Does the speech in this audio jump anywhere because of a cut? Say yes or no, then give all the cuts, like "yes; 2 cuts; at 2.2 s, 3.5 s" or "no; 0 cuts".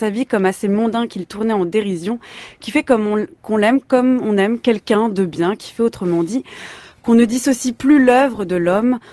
no; 0 cuts